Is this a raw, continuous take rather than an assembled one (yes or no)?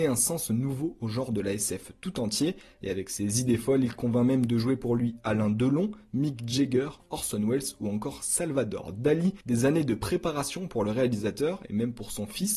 no